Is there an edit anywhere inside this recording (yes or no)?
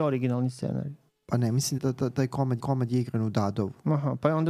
yes